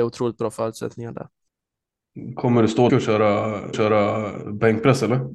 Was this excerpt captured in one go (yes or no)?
no